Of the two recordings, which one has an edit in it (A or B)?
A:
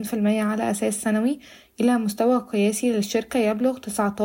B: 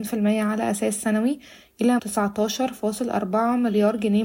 B